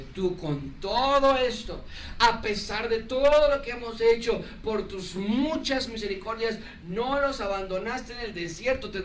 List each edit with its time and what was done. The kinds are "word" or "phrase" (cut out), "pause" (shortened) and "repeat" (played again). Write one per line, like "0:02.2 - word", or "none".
none